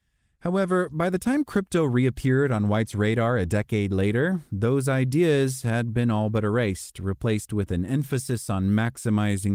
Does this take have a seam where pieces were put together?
no; 0 cuts

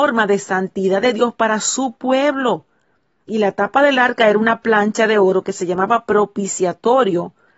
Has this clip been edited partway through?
no; 0 cuts

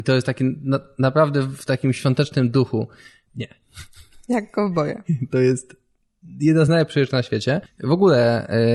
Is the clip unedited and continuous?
yes; 0 cuts

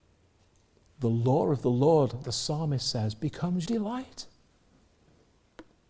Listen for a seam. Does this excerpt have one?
yes; 2 cuts; at 2.2 s, 3.7 s

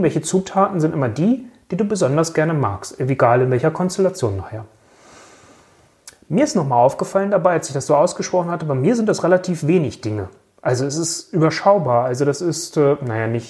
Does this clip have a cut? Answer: no; 0 cuts

